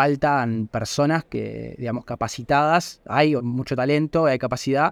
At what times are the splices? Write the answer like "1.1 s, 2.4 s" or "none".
3.4 s